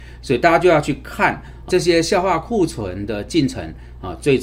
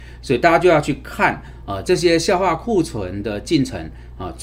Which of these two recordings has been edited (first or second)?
first